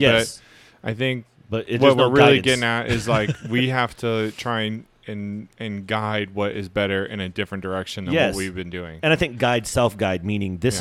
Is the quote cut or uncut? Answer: uncut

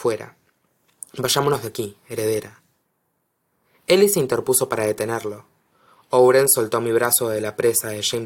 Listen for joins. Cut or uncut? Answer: uncut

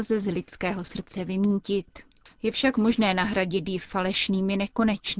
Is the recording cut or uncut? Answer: uncut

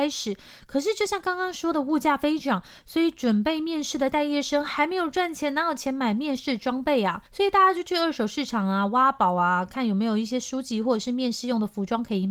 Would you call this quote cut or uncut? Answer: cut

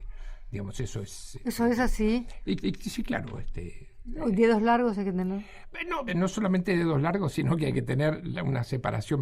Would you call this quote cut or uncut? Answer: cut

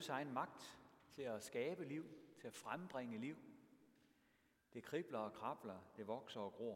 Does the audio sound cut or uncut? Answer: uncut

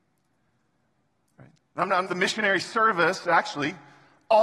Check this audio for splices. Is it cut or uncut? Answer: cut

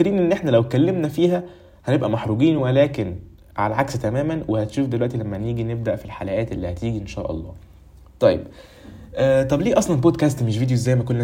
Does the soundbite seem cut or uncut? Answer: uncut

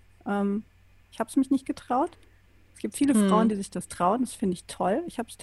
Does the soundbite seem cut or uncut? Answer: uncut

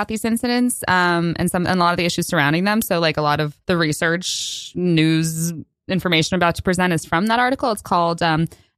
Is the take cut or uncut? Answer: cut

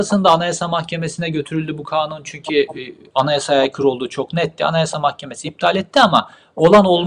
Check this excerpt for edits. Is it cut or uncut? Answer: uncut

